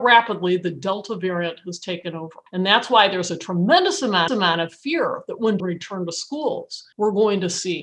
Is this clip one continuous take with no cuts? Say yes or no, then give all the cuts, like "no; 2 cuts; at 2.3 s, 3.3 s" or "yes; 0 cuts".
no; 4 cuts; at 2.5 s, 4.3 s, 5.6 s, 6.9 s